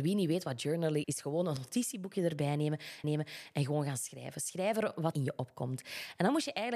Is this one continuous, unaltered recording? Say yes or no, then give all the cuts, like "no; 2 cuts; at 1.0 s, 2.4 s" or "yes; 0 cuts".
no; 3 cuts; at 1.0 s, 3.0 s, 5.1 s